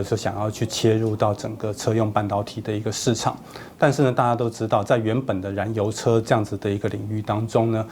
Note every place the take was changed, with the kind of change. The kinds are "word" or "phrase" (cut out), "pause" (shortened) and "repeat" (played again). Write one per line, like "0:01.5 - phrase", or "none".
none